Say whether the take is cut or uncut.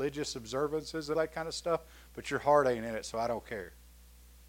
cut